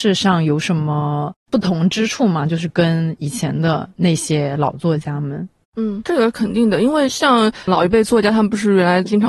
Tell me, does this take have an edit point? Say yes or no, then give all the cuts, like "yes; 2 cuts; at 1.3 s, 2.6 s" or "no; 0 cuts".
yes; 1 cut; at 7.7 s